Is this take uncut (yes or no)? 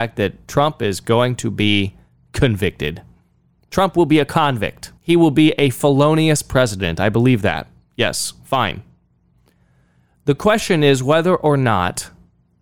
no